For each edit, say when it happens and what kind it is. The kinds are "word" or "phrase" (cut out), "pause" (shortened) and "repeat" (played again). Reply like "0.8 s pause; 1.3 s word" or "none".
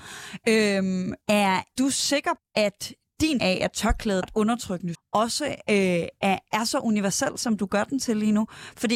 1.2 s word; 1.7 s word; 2.4 s word; 3.4 s word; 4.2 s word; 4.9 s word